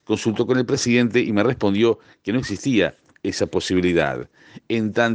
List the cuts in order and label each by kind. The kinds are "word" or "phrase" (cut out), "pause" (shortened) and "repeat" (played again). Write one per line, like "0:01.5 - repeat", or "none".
none